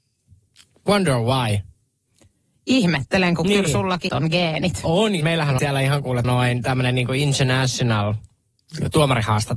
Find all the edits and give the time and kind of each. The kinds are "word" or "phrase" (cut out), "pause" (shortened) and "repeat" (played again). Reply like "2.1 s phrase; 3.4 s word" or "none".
4.1 s word; 5.2 s word; 5.6 s word; 6.2 s word